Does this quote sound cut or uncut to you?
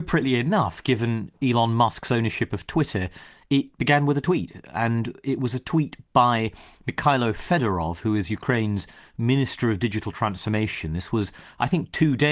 uncut